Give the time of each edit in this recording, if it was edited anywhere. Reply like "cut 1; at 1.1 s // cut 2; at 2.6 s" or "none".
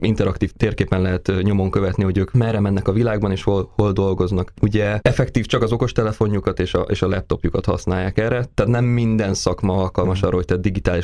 none